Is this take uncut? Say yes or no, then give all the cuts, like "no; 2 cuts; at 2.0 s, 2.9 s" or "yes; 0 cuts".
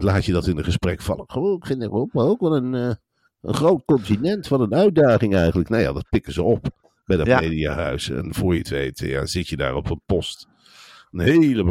yes; 0 cuts